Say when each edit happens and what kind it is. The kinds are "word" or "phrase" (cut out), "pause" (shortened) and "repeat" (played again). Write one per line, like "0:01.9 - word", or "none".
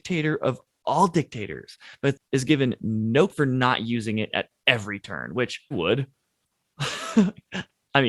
0:03.3 - word
0:05.7 - word